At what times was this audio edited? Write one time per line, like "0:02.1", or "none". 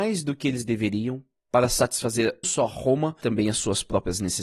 0:02.4
0:03.2